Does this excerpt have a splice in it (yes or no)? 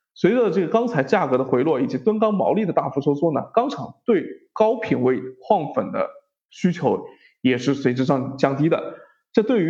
no